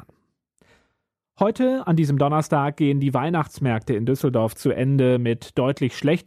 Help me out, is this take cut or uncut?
uncut